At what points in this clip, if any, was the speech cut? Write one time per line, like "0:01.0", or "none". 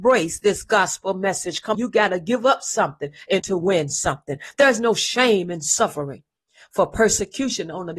0:01.7
0:03.4